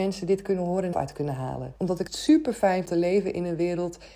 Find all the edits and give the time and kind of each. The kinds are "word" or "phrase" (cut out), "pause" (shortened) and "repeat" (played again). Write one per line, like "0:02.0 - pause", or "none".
0:00.9 - phrase
0:01.8 - pause
0:02.1 - word
0:02.9 - phrase